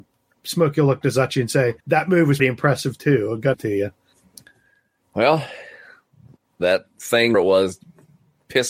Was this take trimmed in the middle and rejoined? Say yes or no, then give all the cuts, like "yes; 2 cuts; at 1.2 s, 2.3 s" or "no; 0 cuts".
yes; 6 cuts; at 1.0 s, 1.8 s, 2.4 s, 3.5 s, 6.4 s, 7.3 s